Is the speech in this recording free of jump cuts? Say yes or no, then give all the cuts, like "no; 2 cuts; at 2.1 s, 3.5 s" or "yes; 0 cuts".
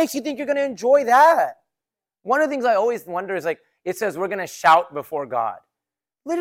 yes; 0 cuts